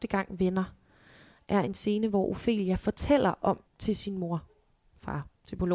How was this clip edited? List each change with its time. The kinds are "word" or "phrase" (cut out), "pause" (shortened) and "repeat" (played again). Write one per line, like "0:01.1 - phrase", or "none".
0:03.7 - pause